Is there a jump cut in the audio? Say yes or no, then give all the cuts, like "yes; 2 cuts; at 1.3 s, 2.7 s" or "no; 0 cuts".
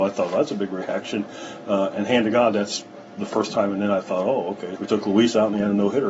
yes; 1 cut; at 4.8 s